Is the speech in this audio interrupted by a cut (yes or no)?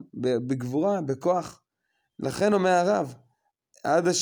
no